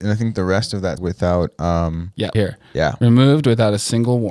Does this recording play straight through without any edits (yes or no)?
no